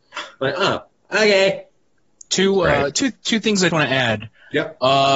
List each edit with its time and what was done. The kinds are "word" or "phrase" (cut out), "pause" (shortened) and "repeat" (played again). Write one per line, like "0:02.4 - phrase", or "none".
0:03.7 - word